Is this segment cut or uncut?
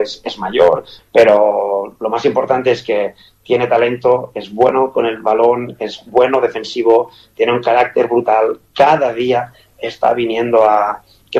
uncut